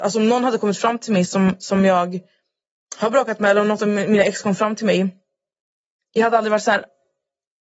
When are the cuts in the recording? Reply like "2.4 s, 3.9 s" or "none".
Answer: none